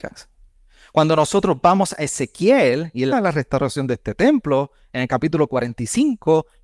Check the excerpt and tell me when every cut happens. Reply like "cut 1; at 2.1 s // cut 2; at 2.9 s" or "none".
cut 1; at 3.1 s